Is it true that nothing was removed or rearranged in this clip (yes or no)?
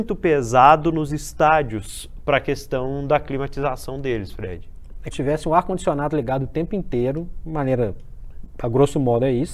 no